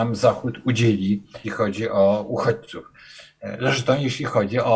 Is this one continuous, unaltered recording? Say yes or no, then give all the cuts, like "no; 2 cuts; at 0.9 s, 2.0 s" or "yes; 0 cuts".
no; 1 cut; at 1.4 s